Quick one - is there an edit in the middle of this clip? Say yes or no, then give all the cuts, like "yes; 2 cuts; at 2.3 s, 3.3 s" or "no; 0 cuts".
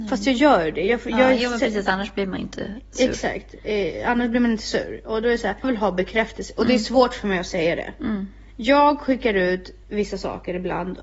yes; 2 cuts; at 5.6 s, 9.8 s